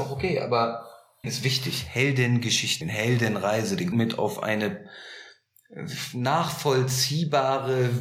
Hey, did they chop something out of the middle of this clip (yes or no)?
yes